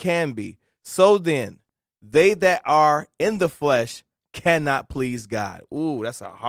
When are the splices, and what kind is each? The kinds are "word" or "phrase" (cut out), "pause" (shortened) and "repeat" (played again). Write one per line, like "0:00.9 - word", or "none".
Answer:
none